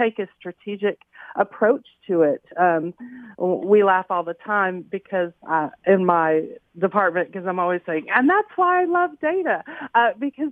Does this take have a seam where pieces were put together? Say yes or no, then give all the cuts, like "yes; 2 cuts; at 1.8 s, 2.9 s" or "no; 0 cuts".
yes; 1 cut; at 5.4 s